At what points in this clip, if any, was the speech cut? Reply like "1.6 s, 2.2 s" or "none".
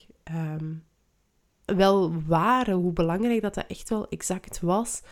1.7 s